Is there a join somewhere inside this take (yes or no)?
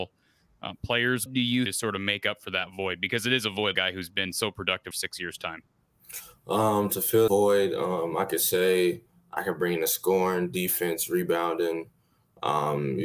yes